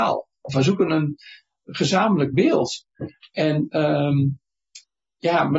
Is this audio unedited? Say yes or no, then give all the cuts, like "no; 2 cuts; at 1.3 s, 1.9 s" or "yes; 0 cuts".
yes; 0 cuts